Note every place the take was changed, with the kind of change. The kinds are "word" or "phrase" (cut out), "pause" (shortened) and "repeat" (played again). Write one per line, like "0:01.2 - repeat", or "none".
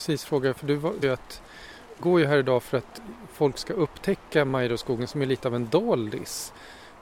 0:01.0 - word
0:02.0 - word